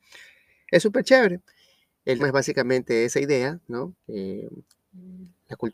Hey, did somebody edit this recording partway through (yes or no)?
yes